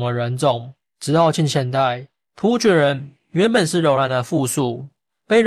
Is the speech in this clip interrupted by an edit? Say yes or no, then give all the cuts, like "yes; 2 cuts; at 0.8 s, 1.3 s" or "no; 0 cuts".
no; 0 cuts